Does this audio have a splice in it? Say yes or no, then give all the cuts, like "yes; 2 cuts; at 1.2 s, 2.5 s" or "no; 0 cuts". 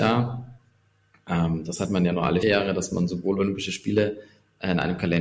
yes; 1 cut; at 2.4 s